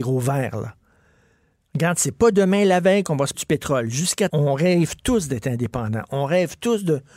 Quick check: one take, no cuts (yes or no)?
no